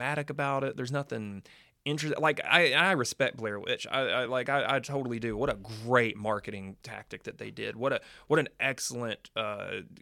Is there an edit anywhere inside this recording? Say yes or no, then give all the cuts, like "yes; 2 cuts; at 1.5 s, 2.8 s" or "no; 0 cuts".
no; 0 cuts